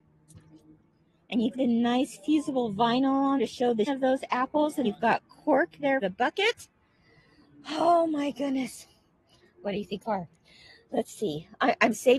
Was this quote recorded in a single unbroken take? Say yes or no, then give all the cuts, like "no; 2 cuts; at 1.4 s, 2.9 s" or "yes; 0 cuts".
no; 6 cuts; at 1.5 s, 3.4 s, 3.9 s, 4.8 s, 6.0 s, 10.0 s